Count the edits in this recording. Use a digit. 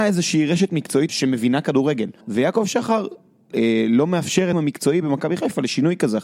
4